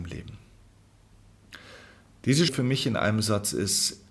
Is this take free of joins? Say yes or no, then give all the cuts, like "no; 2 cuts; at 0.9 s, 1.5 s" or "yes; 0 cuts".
no; 1 cut; at 2.5 s